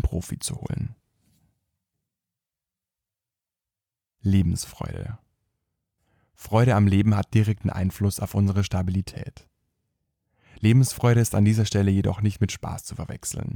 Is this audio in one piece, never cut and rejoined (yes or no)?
yes